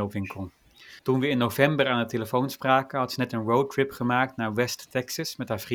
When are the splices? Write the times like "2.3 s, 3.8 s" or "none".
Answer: 1.0 s

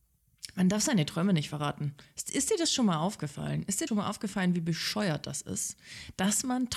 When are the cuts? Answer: 3.9 s

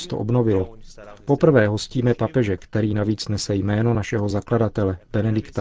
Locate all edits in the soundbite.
none

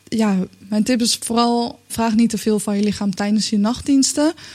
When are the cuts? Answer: 1.9 s

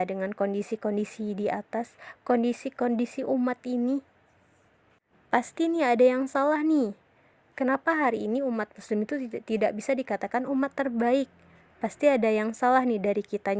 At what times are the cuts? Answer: none

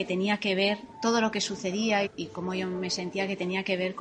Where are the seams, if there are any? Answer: 0.9 s, 2.1 s

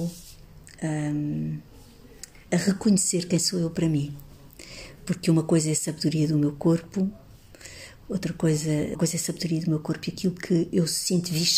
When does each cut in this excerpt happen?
8.9 s

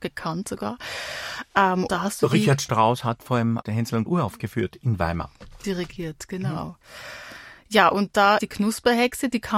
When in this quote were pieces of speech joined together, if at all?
1.9 s, 3.6 s, 4.1 s, 8.4 s

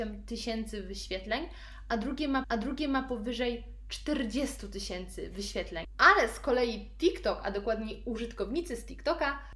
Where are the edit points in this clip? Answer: 2.4 s

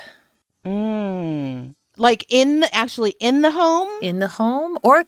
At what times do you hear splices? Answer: 2.7 s

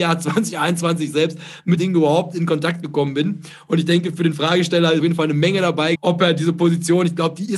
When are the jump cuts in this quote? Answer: 1.8 s, 5.0 s, 6.0 s

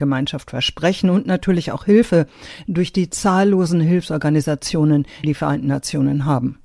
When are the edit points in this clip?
5.2 s

